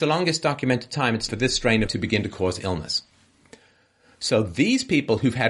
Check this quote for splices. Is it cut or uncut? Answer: cut